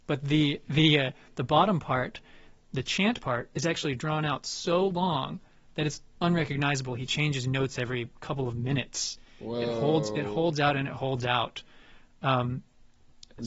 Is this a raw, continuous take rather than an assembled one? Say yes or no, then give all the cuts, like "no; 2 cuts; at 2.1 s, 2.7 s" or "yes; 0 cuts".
yes; 0 cuts